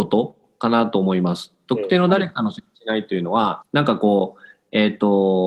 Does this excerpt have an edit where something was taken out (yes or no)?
yes